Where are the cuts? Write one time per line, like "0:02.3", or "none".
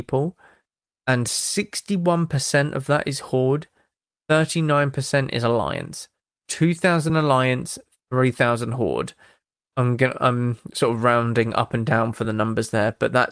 none